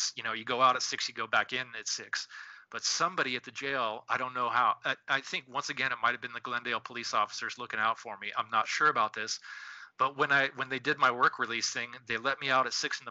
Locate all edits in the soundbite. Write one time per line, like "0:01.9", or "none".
none